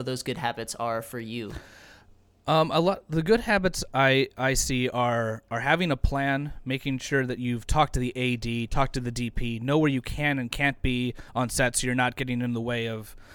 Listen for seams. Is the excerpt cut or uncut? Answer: uncut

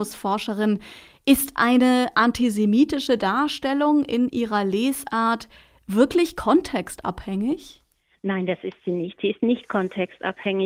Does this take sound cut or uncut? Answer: uncut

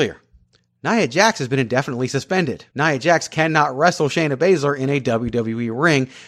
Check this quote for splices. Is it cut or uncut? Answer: cut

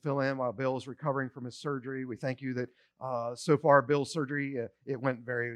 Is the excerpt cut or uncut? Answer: uncut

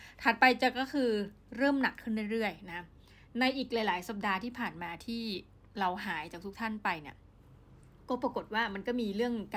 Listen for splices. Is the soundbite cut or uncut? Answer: uncut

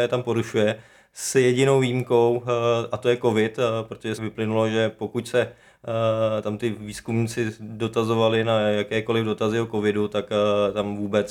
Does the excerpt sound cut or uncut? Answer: cut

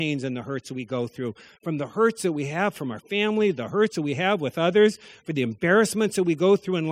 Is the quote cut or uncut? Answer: uncut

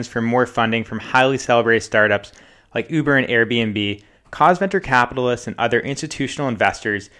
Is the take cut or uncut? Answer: uncut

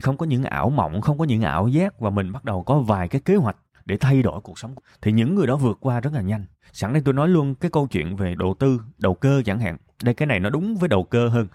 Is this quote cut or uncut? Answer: cut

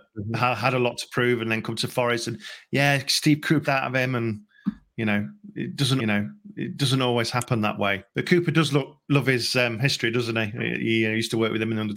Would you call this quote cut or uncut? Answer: cut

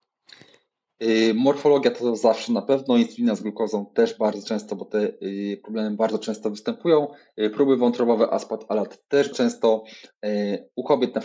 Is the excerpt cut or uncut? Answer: cut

